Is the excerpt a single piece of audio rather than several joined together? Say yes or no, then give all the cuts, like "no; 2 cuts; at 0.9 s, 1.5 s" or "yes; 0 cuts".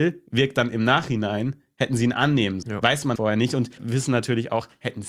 no; 3 cuts; at 2.6 s, 3.2 s, 3.8 s